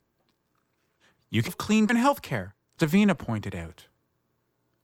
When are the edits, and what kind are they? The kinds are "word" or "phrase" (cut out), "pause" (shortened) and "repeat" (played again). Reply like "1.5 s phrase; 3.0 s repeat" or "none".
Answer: 1.5 s phrase; 1.9 s word; 2.8 s word